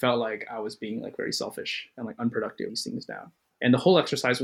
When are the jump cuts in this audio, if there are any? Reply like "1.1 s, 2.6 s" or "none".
2.7 s, 3.4 s

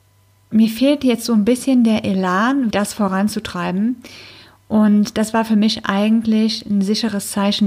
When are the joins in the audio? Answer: 2.7 s

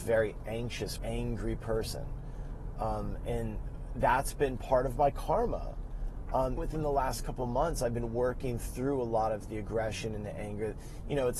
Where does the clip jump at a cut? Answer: 1.0 s, 6.6 s

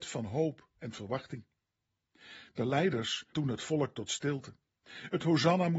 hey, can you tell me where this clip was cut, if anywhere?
3.3 s

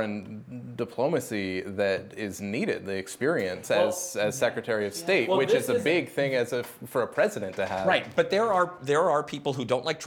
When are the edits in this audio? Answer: none

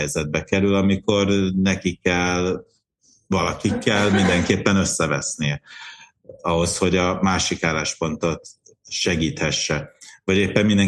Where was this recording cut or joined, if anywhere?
none

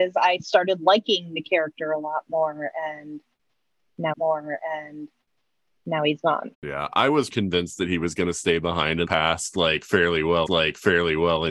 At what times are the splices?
4.1 s, 6.5 s, 7.3 s, 9.0 s, 10.5 s

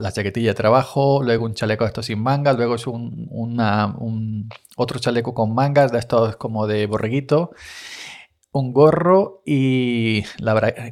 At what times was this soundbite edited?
none

